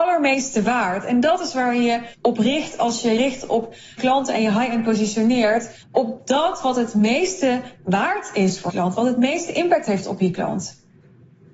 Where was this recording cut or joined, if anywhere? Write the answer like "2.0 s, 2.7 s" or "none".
2.1 s, 3.2 s, 4.0 s, 5.8 s, 8.7 s